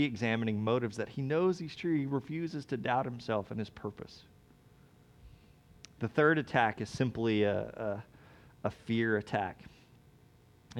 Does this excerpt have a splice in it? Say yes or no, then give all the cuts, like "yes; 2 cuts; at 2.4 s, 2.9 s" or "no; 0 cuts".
no; 0 cuts